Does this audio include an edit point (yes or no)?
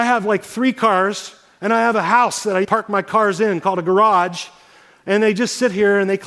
yes